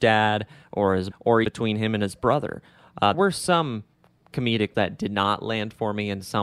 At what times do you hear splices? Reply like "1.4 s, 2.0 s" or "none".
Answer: 1.1 s, 1.4 s, 3.1 s, 4.7 s